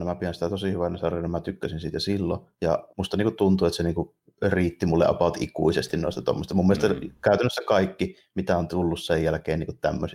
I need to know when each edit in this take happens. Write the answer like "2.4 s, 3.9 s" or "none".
2.9 s